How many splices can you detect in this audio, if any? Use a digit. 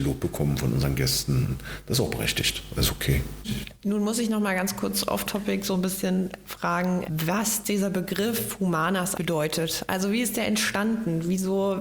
1